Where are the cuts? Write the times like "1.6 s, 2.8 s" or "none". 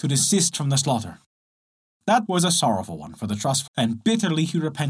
2.3 s, 3.7 s